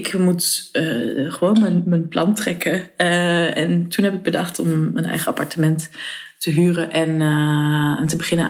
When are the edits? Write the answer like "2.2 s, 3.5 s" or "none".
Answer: none